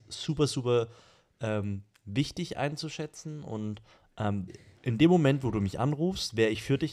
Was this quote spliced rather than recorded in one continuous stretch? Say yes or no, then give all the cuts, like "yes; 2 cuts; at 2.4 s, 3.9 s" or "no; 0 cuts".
yes; 1 cut; at 4.5 s